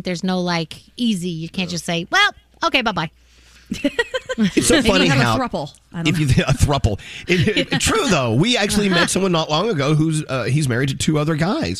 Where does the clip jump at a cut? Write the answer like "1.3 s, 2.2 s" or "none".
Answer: none